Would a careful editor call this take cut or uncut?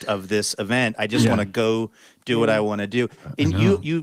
uncut